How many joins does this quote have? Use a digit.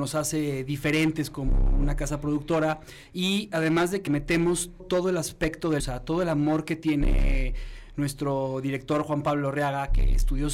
3